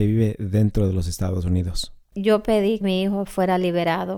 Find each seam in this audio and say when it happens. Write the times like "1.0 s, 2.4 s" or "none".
2.0 s, 2.8 s

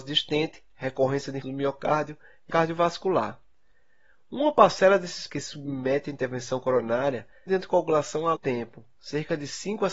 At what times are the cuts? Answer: 1.4 s, 2.5 s, 5.3 s, 7.5 s, 8.3 s

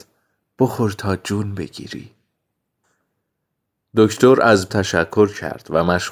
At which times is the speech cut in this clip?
4.7 s

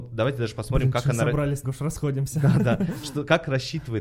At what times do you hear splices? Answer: 1.6 s

